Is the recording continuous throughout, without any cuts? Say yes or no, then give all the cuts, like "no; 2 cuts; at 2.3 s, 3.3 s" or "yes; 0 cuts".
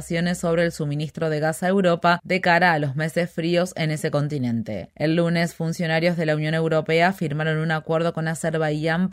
yes; 0 cuts